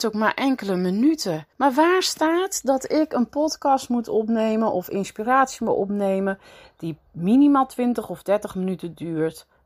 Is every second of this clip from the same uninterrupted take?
no; 2 cuts; at 1.5 s, 7.1 s

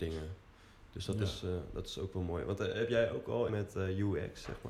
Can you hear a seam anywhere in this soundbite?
yes; 1 cut; at 3.5 s

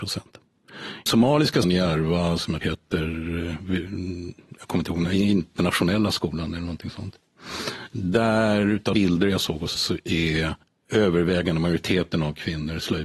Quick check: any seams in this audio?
yes; 6 cuts; at 1.1 s, 1.6 s, 2.6 s, 8.9 s, 9.7 s, 10.6 s

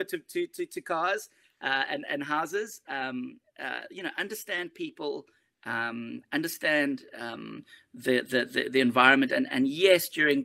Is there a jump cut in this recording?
no; 0 cuts

